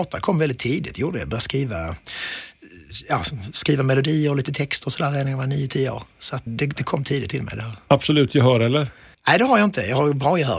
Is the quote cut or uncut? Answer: cut